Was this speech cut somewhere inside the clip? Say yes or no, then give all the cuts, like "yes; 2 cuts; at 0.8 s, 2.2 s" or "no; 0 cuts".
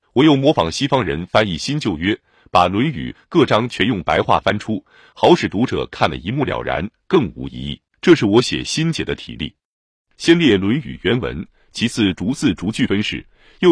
yes; 1 cut; at 7.9 s